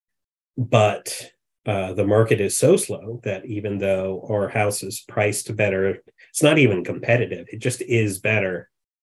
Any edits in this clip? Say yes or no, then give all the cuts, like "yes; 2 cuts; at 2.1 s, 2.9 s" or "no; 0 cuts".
no; 0 cuts